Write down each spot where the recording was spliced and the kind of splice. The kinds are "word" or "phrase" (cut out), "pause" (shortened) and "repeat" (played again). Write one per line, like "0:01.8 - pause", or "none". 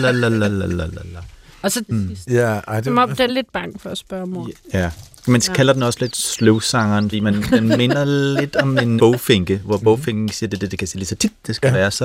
0:01.9 - phrase
0:03.3 - word
0:07.1 - word
0:09.0 - word